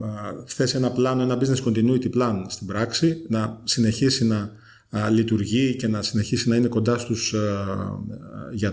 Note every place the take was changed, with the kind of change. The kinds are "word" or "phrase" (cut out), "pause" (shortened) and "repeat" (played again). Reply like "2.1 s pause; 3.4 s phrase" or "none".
none

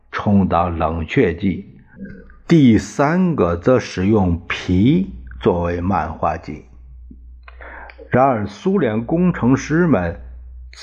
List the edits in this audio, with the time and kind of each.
none

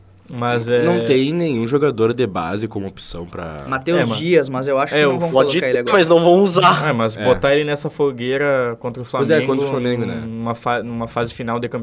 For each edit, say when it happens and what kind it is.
none

